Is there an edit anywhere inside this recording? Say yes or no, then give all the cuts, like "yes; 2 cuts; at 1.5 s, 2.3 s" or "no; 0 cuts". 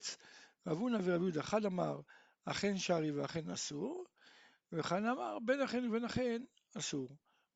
no; 0 cuts